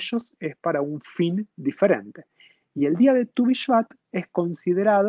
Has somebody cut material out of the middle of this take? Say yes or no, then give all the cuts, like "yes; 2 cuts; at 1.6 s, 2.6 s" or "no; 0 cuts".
no; 0 cuts